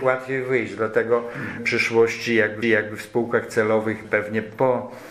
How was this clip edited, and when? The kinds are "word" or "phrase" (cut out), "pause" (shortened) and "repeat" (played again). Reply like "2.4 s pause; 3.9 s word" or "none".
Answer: 1.6 s word; 2.6 s repeat; 4.0 s word